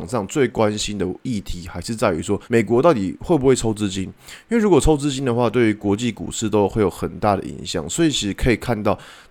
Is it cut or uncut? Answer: cut